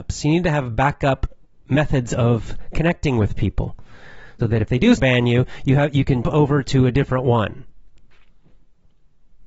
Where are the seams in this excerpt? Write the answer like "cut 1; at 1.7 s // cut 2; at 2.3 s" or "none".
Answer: cut 1; at 4.4 s // cut 2; at 5.0 s // cut 3; at 6.2 s